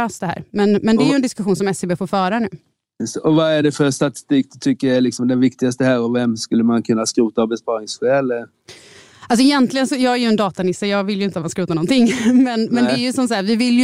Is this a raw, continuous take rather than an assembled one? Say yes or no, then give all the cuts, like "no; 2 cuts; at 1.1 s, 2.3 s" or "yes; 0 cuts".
yes; 0 cuts